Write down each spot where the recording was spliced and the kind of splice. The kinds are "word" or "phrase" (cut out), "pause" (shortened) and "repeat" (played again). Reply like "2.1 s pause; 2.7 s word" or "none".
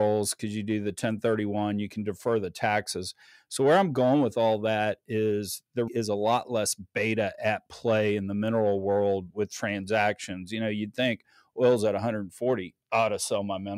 5.9 s word